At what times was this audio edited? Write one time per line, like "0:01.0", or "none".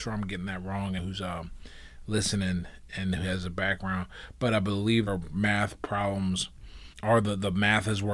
0:01.0
0:05.1
0:06.9